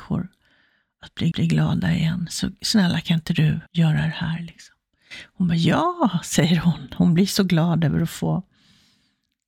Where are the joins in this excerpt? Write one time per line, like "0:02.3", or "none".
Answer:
0:01.3
0:03.7